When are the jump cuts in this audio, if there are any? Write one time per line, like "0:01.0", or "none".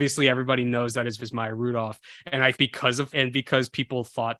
0:01.2
0:02.5
0:03.1